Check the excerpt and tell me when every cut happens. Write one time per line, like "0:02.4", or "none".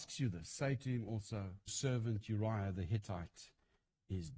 0:01.7